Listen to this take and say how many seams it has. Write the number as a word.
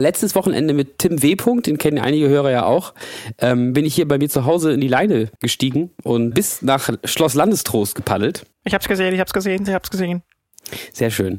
three